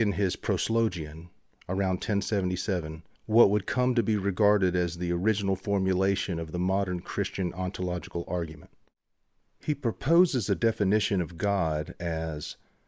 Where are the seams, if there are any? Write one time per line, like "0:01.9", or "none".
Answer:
0:03.2